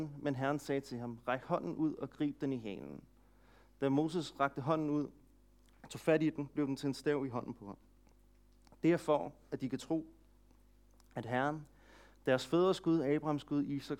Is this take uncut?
yes; 0 cuts

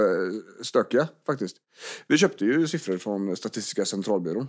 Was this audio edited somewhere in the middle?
no; 0 cuts

